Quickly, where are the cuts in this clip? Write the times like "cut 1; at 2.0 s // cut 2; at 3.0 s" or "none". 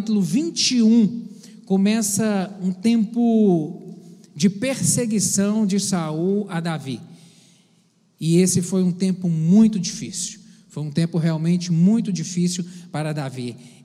none

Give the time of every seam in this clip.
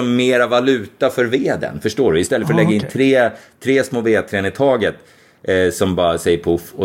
none

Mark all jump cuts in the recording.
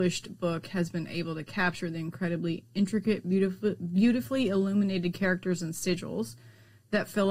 none

